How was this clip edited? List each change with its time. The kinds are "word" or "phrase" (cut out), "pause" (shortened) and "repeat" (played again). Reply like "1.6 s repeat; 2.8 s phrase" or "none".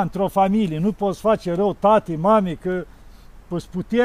none

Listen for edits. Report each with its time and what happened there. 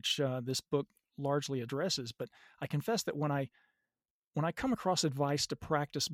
none

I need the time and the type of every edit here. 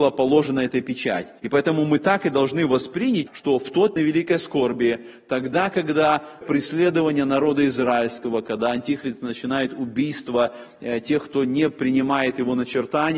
1.4 s pause; 3.3 s word; 4.0 s phrase; 6.4 s phrase

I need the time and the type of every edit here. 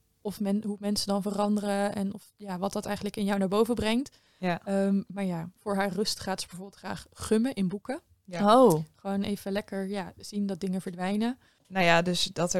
none

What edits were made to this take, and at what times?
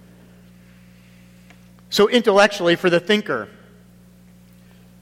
none

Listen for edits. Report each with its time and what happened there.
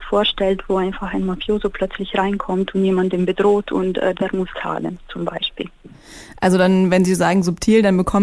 4.5 s word

